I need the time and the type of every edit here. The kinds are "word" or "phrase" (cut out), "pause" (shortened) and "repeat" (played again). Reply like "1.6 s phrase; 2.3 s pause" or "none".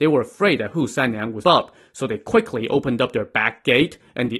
1.4 s word